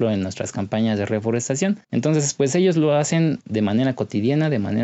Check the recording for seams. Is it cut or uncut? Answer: cut